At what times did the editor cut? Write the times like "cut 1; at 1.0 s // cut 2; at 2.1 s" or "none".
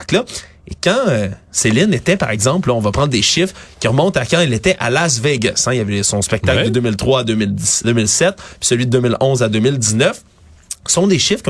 cut 1; at 7.8 s